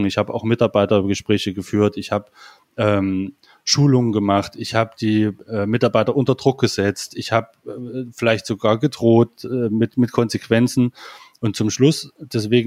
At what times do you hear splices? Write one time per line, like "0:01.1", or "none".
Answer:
none